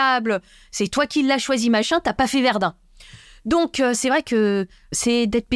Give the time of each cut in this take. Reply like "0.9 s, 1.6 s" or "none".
none